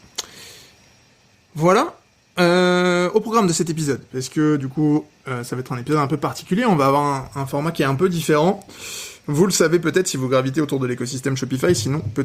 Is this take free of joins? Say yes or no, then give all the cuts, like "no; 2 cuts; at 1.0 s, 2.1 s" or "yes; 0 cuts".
yes; 0 cuts